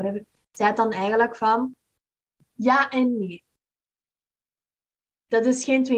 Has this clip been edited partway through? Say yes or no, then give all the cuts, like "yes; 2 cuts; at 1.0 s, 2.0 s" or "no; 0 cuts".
no; 0 cuts